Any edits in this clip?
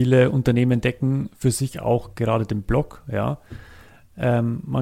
no; 0 cuts

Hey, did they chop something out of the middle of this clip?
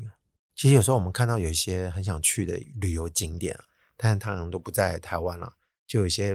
no; 0 cuts

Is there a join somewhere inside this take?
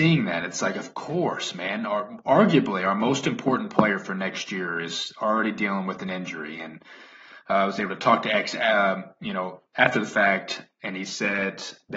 no; 0 cuts

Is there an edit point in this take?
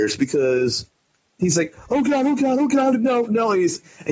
no; 0 cuts

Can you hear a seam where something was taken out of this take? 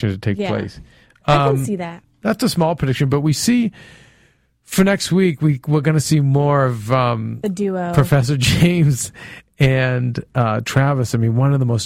no; 0 cuts

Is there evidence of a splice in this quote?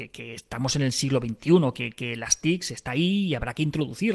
no; 0 cuts

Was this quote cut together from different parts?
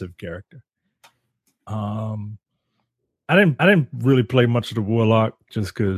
yes; 1 cut; at 3.6 s

